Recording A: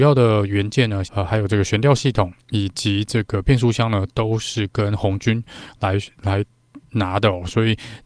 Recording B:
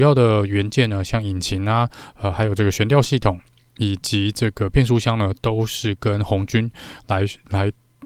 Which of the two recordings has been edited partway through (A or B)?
A